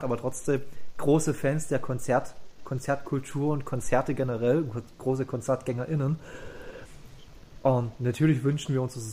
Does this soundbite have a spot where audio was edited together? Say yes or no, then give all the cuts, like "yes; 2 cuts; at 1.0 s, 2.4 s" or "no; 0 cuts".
no; 0 cuts